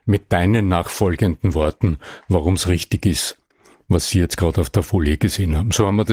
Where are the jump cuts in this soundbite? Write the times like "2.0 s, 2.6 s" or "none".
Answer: none